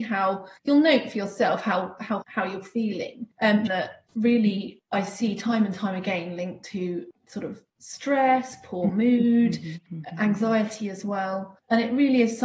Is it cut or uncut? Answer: cut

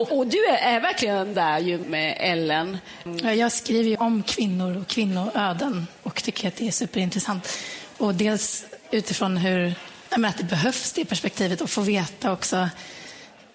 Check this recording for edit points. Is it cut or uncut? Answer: cut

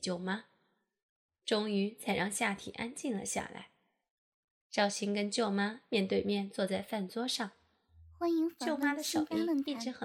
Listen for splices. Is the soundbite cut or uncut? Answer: uncut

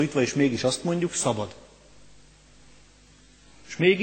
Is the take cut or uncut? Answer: uncut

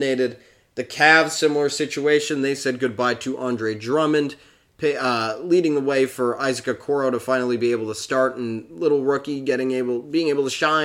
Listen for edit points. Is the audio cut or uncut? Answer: uncut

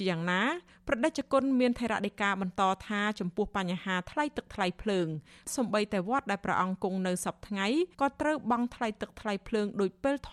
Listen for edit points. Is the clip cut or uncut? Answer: cut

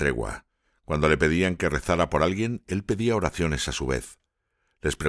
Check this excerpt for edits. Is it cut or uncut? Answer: uncut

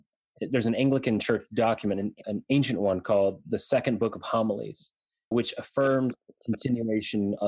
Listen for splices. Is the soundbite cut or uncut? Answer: cut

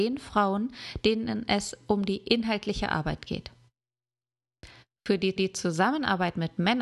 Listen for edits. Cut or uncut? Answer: cut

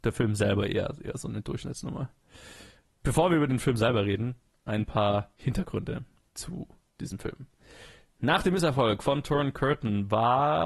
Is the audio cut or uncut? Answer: uncut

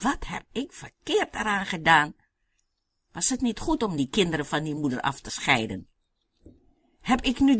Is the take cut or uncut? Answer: uncut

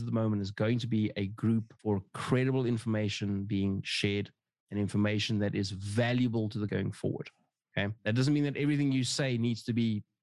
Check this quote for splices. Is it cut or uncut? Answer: cut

